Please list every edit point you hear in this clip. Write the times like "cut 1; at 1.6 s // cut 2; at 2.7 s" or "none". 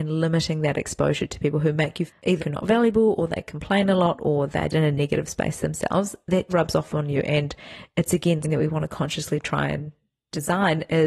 cut 1; at 2.1 s // cut 2; at 2.4 s // cut 3; at 4.7 s // cut 4; at 6.5 s // cut 5; at 8.4 s